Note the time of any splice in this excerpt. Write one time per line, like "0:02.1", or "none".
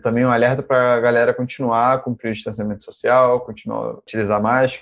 none